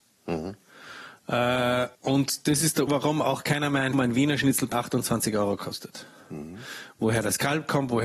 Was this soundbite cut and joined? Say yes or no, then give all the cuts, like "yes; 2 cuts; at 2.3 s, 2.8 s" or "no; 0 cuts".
yes; 4 cuts; at 1.9 s, 2.9 s, 3.9 s, 4.7 s